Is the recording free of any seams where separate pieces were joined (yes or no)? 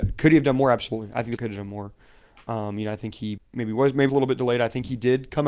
no